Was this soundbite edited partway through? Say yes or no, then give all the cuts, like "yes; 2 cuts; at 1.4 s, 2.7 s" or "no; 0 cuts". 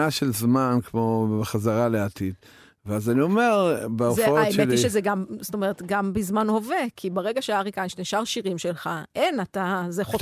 no; 0 cuts